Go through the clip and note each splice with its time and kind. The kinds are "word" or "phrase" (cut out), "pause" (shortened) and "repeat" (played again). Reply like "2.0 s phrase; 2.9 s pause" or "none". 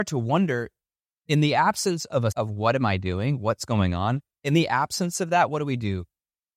2.3 s word

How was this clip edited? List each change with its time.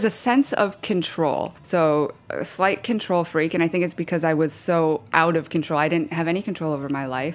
1.6 s pause

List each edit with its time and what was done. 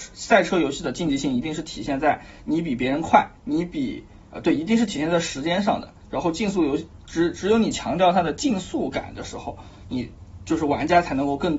3.4 s pause

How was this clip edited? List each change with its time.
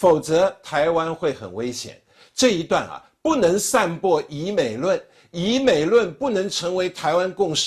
none

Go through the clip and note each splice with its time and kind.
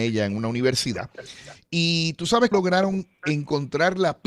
2.5 s word

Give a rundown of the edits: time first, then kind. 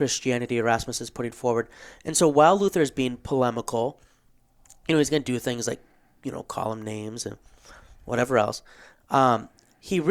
none

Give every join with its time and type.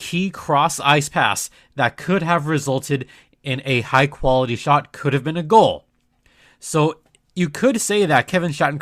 none

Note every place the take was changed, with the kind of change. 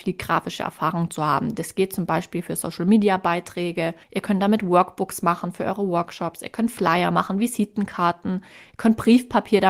4.0 s pause

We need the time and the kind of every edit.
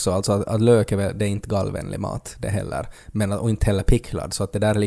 none

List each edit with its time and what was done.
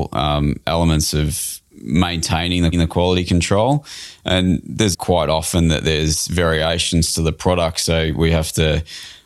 1.7 s pause; 2.7 s repeat; 4.9 s word

